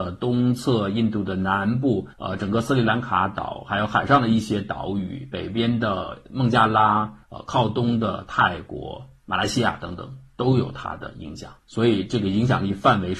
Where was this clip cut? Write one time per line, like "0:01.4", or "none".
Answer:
0:02.1
0:07.2
0:11.6